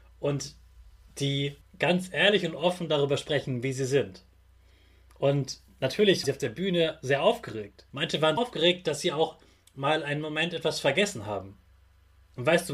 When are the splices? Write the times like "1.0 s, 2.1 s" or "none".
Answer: 1.6 s, 6.2 s, 7.9 s, 8.4 s